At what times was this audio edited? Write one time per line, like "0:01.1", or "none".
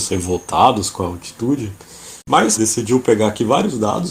0:02.2
0:02.6